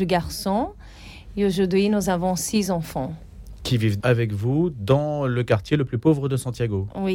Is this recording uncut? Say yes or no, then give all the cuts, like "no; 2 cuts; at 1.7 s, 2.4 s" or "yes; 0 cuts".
no; 1 cut; at 4.0 s